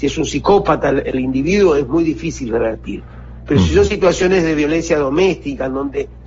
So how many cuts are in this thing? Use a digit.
0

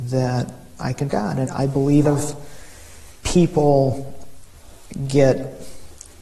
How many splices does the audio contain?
3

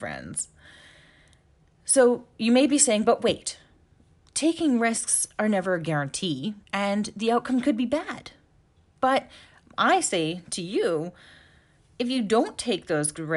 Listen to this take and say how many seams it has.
1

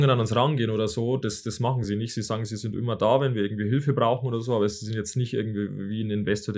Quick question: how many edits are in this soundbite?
0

